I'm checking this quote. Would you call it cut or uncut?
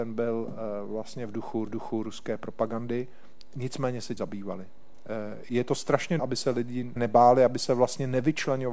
cut